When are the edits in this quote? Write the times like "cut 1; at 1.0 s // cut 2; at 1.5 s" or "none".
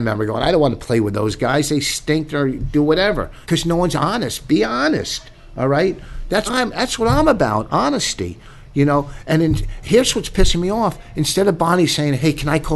cut 1; at 3.4 s // cut 2; at 6.5 s